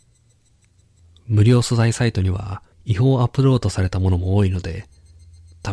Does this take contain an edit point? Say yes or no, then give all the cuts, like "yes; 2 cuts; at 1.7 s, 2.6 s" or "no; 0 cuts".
yes; 1 cut; at 2.7 s